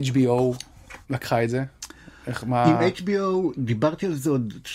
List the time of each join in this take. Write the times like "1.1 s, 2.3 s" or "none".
1.0 s, 2.2 s